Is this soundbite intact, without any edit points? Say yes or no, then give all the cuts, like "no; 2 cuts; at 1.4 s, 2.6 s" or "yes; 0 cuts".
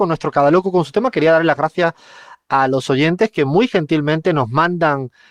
yes; 0 cuts